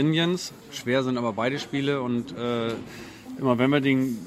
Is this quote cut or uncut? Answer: uncut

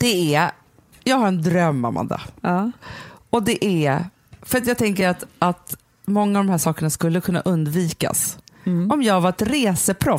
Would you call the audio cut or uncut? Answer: uncut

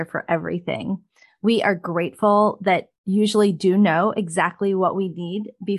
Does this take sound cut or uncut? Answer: cut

